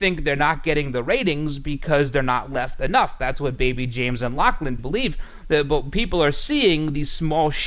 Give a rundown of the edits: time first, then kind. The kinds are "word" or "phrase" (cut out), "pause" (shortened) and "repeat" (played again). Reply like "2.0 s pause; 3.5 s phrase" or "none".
4.8 s word